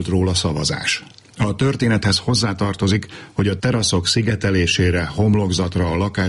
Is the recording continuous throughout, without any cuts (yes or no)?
yes